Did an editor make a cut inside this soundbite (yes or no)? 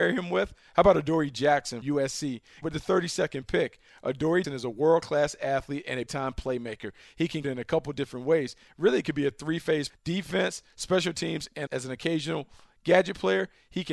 yes